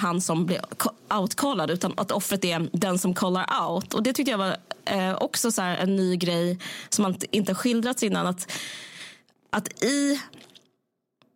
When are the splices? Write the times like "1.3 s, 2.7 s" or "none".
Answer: 9.3 s